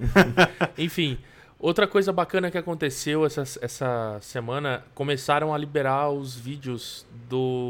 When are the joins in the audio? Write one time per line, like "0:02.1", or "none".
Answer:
none